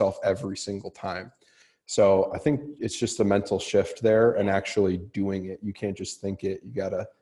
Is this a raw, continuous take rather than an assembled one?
yes; 0 cuts

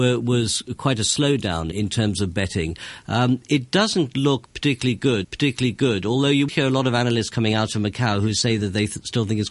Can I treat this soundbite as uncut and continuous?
no; 3 cuts; at 1.7 s, 5.2 s, 6.5 s

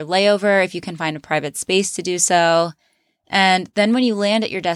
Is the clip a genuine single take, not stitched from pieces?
yes; 0 cuts

